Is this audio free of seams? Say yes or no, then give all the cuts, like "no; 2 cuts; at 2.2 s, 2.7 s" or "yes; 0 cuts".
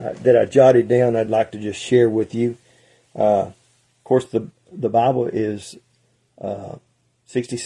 yes; 0 cuts